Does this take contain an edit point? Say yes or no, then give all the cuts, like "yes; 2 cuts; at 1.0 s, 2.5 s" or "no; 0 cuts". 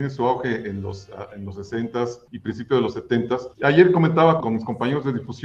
yes; 3 cuts; at 2.3 s, 3.5 s, 4.4 s